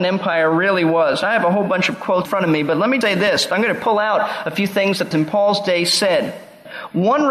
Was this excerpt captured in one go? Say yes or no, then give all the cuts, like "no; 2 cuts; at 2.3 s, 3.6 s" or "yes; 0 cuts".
no; 3 cuts; at 2.2 s, 3.0 s, 5.1 s